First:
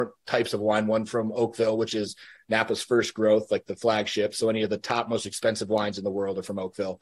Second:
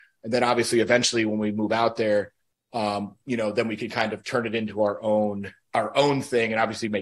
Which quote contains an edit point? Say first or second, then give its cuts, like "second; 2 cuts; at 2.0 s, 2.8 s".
second; 1 cut; at 5.6 s